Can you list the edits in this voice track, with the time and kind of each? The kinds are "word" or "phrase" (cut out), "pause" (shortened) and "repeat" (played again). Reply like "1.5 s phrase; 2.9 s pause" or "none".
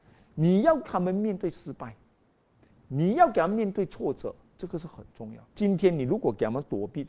5.4 s pause